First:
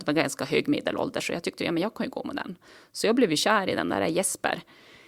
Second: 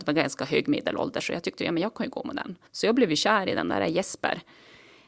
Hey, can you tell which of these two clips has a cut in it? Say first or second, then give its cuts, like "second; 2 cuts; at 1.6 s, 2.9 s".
second; 1 cut; at 2.7 s